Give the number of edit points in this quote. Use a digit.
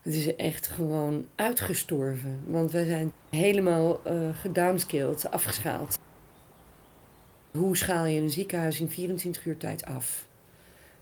0